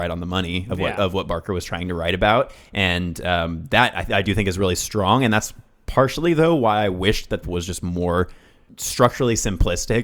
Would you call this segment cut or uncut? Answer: cut